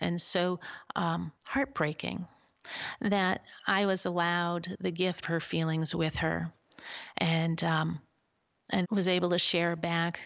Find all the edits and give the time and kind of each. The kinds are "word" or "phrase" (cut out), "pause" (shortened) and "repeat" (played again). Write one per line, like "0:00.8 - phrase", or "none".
0:01.4 - pause
0:05.2 - phrase
0:08.8 - word

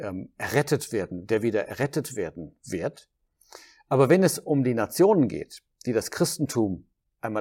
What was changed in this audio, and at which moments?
none

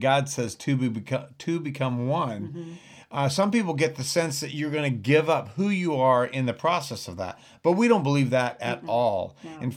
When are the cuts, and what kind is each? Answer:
none

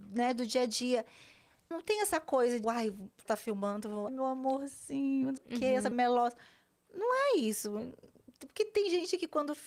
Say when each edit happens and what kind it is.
0:01.7 - word
0:02.6 - word
0:03.3 - word
0:04.1 - word
0:05.4 - word
0:05.9 - word

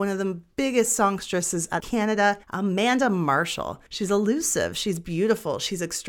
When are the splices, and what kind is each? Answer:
0:01.8 - word
0:02.4 - pause
0:03.9 - pause

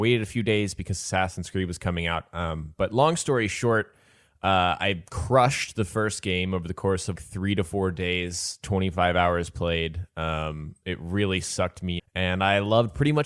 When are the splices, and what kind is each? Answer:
0:07.2 - word
0:12.0 - word

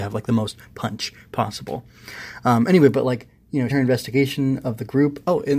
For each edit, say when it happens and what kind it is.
0:03.7 - phrase

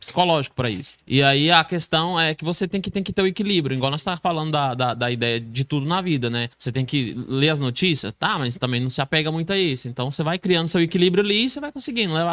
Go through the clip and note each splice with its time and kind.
0:01.0 - pause
0:02.9 - repeat
0:06.5 - pause

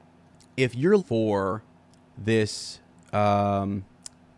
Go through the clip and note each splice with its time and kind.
0:01.0 - word

